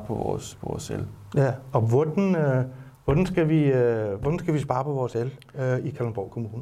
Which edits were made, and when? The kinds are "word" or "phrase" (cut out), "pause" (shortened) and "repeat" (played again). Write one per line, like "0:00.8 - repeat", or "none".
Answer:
none